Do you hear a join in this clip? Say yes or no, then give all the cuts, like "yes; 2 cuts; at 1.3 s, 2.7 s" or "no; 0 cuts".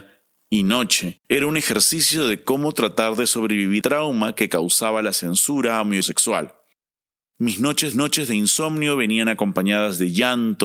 yes; 4 cuts; at 1.2 s, 3.8 s, 6.0 s, 7.9 s